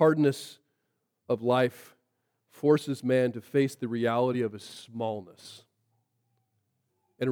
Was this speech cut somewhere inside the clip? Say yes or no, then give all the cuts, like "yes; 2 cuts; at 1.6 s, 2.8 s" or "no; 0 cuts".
no; 0 cuts